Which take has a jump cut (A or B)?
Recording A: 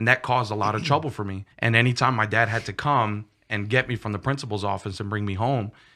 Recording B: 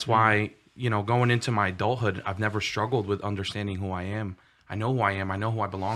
A